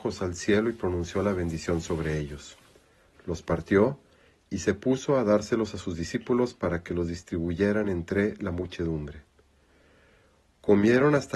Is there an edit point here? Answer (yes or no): no